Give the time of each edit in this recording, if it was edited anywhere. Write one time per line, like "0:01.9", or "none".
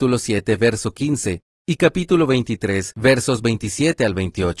none